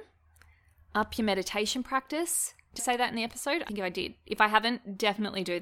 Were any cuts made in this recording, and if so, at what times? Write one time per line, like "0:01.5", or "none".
0:02.8
0:03.7